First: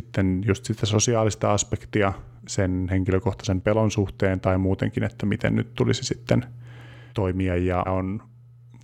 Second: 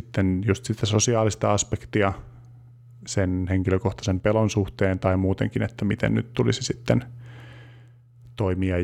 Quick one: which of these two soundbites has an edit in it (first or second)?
first